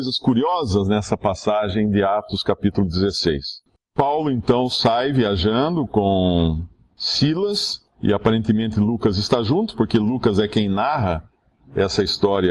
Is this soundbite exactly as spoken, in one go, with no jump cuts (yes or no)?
yes